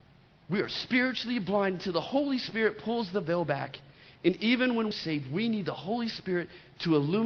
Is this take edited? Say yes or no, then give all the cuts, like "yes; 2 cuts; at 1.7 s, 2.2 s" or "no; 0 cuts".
yes; 1 cut; at 4.9 s